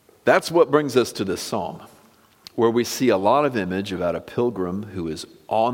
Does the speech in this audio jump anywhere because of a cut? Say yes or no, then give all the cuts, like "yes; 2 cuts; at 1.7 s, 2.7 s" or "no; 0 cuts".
no; 0 cuts